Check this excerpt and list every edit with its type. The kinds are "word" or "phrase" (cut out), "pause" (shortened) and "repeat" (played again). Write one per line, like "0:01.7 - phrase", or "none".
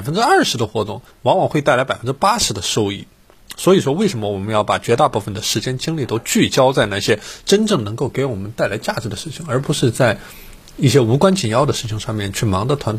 0:01.1 - pause